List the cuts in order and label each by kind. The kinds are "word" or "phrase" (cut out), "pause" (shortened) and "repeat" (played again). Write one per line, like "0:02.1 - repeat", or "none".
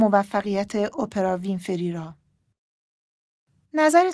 none